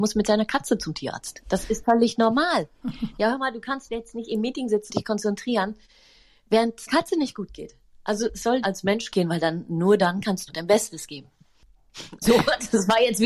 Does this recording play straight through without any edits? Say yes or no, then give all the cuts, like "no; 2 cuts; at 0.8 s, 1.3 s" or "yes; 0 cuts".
no; 7 cuts; at 1.8 s, 3.9 s, 4.9 s, 6.9 s, 8.6 s, 9.1 s, 10.5 s